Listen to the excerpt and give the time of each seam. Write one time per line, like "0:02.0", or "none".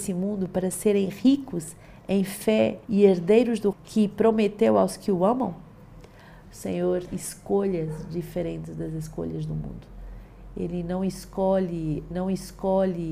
0:02.8
0:03.7
0:07.1
0:12.1

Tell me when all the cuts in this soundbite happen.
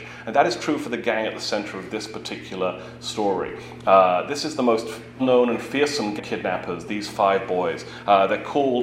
0:05.2
0:06.2
0:06.9

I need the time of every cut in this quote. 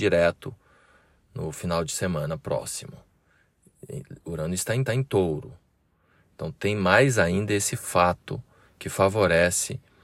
0:04.9

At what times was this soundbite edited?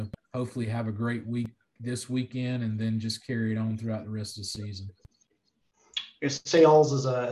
none

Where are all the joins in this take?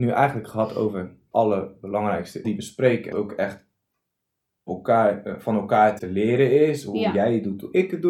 0:01.3
0:02.4
0:03.1
0:04.7
0:06.0

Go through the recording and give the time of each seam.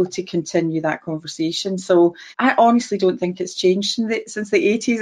0:02.3

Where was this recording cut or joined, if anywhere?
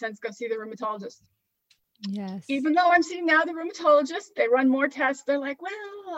none

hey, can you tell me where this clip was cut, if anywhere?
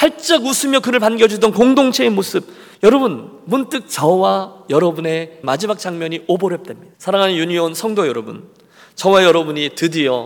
0:02.7
0:05.4
0:06.9

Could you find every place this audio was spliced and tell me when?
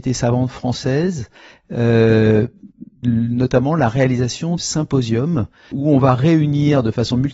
0:03.0
0:04.6
0:05.7

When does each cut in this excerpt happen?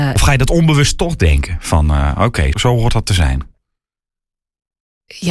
0:02.5

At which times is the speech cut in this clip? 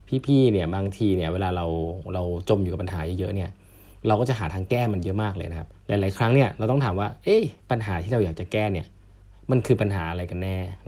0:05.7
0:07.6

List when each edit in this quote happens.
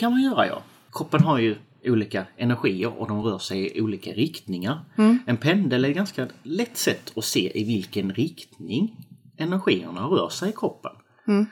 none

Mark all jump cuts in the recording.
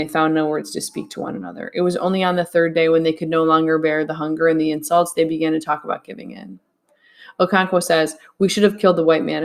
none

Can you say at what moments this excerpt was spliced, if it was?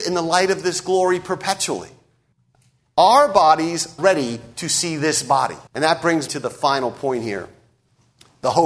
0:02.3
0:04.0
0:05.7
0:06.3

